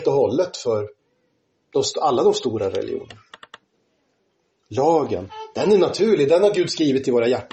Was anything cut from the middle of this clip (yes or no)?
no